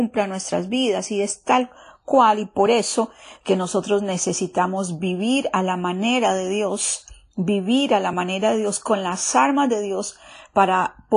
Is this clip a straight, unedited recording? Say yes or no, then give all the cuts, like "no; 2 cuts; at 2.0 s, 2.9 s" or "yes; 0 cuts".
yes; 0 cuts